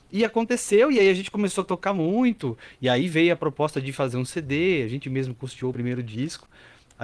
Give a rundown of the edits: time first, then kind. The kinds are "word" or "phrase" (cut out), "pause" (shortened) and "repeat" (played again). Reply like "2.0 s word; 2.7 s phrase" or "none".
none